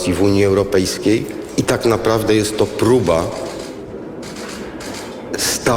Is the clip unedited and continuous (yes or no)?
yes